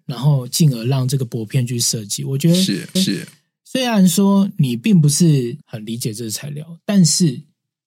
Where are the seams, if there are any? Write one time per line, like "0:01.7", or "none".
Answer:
0:03.0
0:05.6